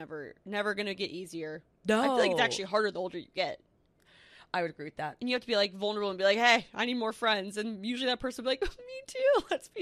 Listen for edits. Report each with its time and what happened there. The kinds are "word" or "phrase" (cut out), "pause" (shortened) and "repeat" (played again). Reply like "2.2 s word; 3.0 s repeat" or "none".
none